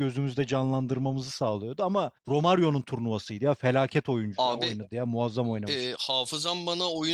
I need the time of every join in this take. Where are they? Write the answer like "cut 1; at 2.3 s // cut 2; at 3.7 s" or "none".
cut 1; at 2.2 s